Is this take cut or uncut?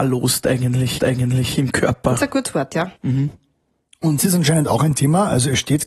cut